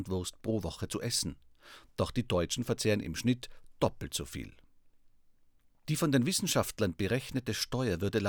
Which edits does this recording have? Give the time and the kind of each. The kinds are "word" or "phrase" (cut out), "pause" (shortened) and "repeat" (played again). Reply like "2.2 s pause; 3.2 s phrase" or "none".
none